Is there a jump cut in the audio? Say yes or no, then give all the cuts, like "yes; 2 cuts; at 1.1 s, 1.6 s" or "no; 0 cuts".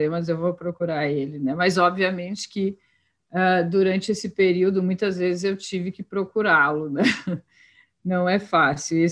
no; 0 cuts